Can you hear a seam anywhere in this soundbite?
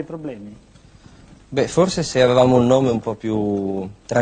no; 0 cuts

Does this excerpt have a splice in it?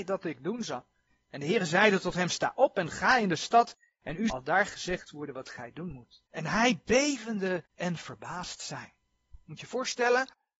yes; 3 cuts; at 4.3 s, 6.3 s, 7.7 s

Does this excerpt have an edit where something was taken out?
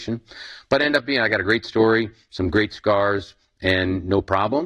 no; 0 cuts

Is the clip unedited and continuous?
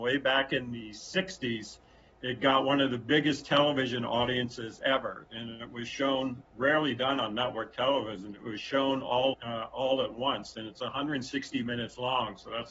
no; 2 cuts; at 6.4 s, 9.3 s

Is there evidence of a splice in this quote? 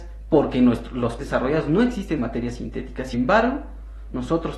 yes; 3 cuts; at 1.2 s, 2.2 s, 3.1 s

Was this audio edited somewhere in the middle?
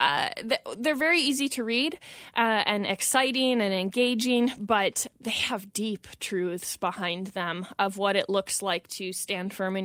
no; 0 cuts

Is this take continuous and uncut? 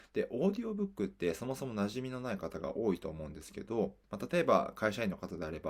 no; 1 cut; at 4.0 s

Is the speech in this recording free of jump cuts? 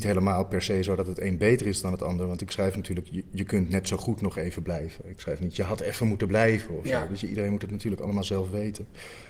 yes; 0 cuts

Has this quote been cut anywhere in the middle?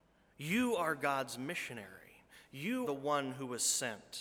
yes; 1 cut; at 2.8 s

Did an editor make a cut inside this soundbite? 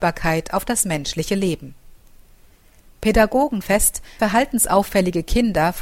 yes; 2 cuts; at 3.6 s, 4.2 s

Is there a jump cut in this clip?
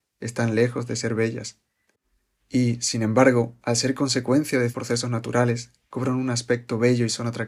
yes; 1 cut; at 4.7 s

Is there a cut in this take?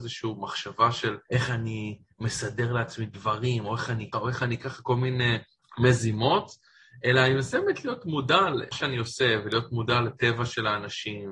yes; 4 cuts; at 1.2 s, 4.1 s, 5.6 s, 8.7 s

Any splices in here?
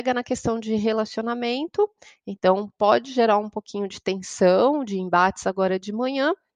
no; 0 cuts

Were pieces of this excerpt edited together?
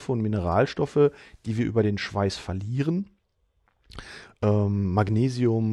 no; 0 cuts

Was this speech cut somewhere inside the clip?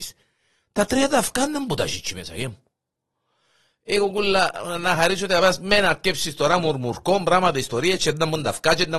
no; 0 cuts

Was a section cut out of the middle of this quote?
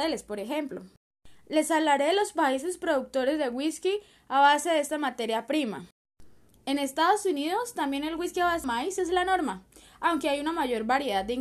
yes; 1 cut; at 8.6 s

